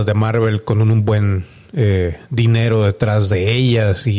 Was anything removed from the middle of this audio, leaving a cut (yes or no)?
no